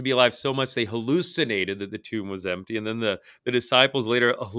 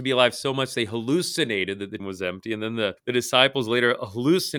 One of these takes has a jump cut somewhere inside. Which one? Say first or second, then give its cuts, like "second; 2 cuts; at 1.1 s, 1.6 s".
second; 2 cuts; at 2.0 s, 3.0 s